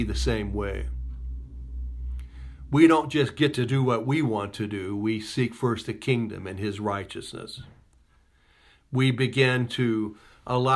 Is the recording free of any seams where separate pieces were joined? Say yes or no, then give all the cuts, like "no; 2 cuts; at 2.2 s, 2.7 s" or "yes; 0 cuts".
yes; 0 cuts